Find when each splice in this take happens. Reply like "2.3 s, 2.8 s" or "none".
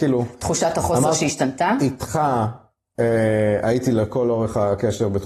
none